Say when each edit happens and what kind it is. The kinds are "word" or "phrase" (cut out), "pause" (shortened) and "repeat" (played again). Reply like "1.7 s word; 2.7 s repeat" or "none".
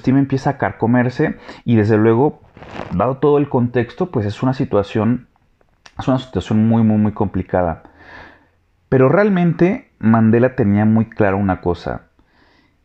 none